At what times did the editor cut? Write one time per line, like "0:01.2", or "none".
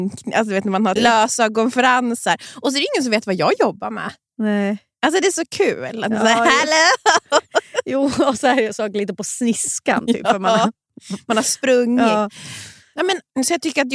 0:01.0

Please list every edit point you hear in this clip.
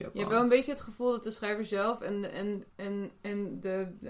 0:02.7

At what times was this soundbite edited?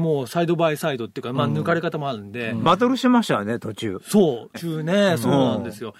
0:04.5

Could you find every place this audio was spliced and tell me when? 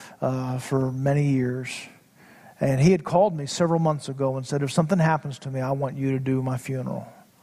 none

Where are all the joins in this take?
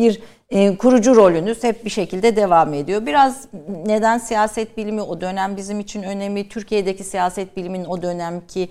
none

